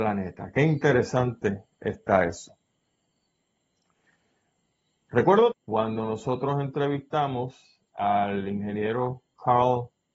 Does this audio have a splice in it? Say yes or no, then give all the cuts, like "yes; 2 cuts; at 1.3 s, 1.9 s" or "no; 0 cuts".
yes; 1 cut; at 5.5 s